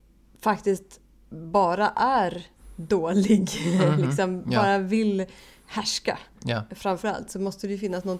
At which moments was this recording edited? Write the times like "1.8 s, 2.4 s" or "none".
none

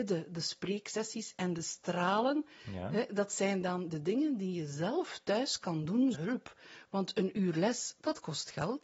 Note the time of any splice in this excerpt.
6.1 s

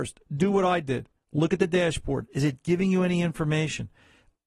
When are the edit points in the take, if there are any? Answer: none

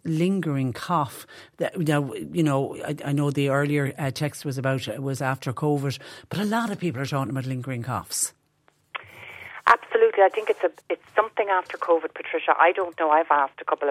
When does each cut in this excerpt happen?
10.8 s

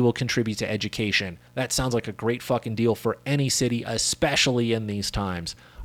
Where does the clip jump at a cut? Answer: 1.5 s

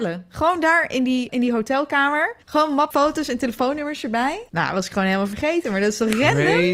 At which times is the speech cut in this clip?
1.3 s, 2.4 s, 2.9 s, 4.5 s

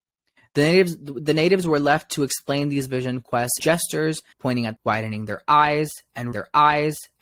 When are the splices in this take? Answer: 3.6 s, 4.3 s, 4.8 s, 6.3 s

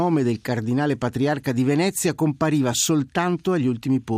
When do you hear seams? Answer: none

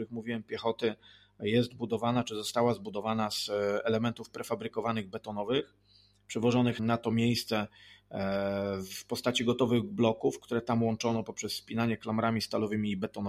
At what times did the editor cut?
6.8 s

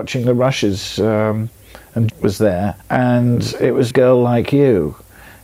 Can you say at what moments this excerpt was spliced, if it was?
2.1 s, 2.8 s, 3.9 s

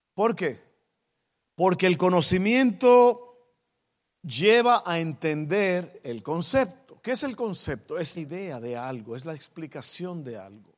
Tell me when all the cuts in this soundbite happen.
8.2 s

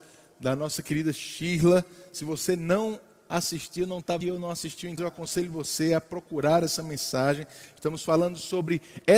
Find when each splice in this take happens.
4.2 s, 5.0 s

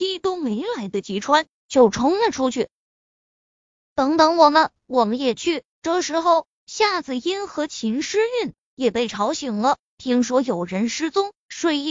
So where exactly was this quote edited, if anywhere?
5.7 s

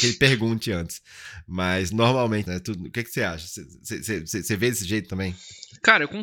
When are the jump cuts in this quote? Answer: 2.4 s

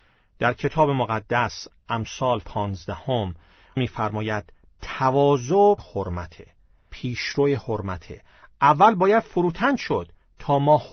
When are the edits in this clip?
2.4 s, 5.8 s, 6.9 s

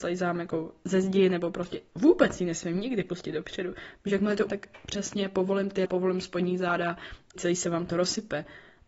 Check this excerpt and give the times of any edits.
4.5 s, 5.9 s, 7.4 s

